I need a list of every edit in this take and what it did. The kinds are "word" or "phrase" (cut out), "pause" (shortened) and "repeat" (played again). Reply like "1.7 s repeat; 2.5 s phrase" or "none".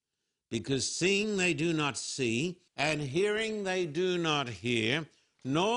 2.7 s pause